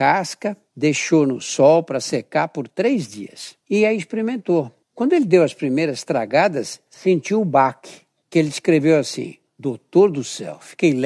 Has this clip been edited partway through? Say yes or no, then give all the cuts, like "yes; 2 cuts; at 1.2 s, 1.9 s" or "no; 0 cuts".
yes; 3 cuts; at 3.6 s, 4.8 s, 9.5 s